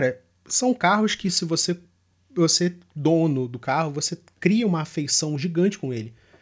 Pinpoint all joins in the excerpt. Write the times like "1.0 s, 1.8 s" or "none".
none